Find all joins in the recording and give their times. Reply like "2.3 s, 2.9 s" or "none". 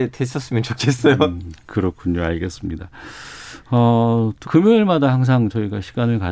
4.4 s